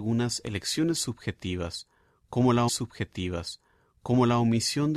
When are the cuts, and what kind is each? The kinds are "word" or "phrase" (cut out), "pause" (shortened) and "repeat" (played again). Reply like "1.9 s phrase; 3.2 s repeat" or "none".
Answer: 2.7 s repeat